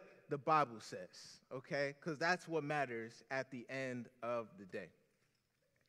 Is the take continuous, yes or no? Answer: yes